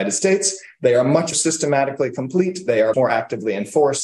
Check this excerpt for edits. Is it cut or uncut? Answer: cut